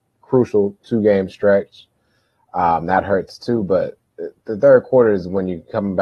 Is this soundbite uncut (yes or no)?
yes